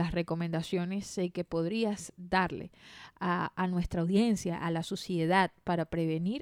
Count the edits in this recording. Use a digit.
0